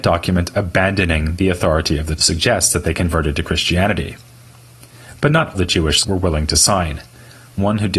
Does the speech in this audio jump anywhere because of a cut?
yes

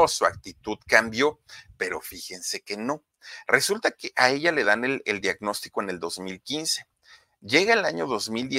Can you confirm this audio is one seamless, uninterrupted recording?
yes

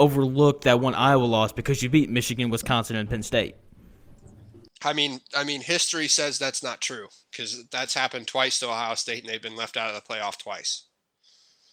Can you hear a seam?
no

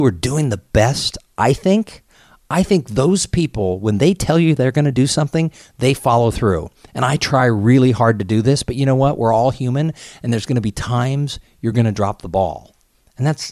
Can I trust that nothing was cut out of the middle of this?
yes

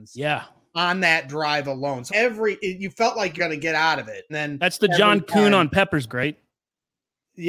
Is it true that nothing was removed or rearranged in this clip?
no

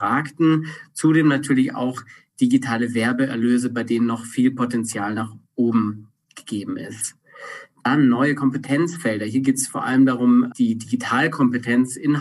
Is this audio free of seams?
no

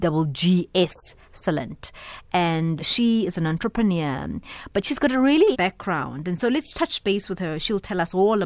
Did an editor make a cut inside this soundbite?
yes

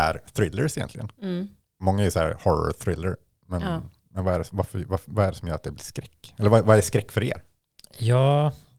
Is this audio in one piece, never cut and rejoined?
yes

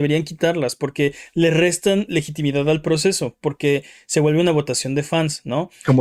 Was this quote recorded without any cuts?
yes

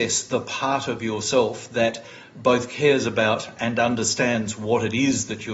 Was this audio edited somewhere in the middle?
no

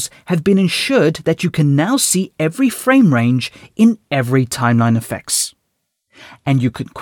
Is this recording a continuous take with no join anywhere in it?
yes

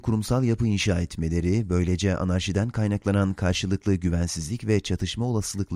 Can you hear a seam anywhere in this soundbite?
no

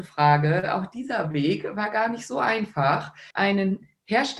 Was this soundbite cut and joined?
yes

